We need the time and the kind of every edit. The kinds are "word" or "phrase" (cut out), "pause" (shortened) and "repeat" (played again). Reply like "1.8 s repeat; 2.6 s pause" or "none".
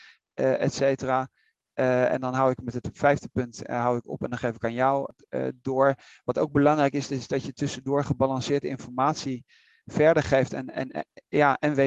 none